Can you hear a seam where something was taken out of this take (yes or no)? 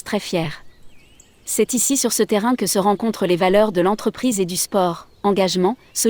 no